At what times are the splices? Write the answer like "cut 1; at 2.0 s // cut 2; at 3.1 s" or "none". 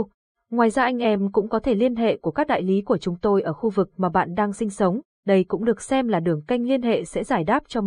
none